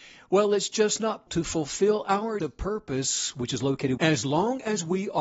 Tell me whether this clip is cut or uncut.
cut